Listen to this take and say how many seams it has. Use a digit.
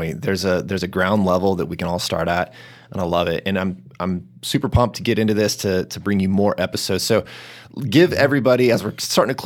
0